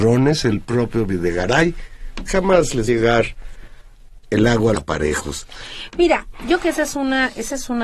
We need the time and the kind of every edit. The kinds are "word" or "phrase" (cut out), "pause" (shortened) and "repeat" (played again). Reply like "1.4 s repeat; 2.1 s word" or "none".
2.3 s word; 2.9 s phrase; 4.7 s word; 6.6 s word